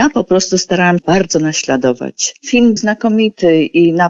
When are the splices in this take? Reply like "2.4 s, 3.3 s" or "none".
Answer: 1.0 s, 2.8 s

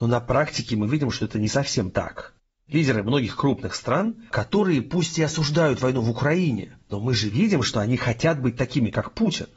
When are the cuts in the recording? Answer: 6.8 s

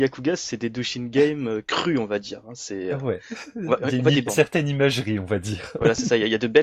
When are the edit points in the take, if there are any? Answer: 1.6 s, 4.3 s

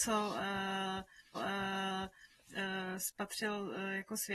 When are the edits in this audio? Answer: 1.3 s

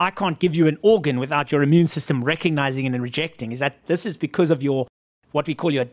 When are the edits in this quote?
none

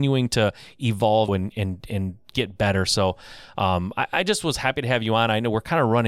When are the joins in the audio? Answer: 1.3 s

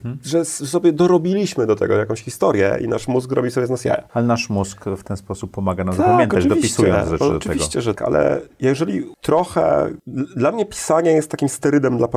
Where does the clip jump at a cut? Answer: 8.0 s

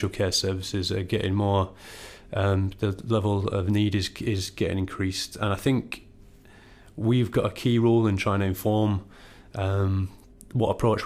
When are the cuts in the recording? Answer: none

